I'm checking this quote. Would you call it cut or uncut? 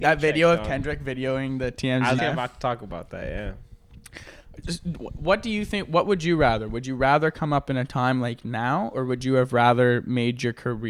cut